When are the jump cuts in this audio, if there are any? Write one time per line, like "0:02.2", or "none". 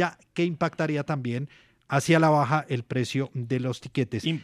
none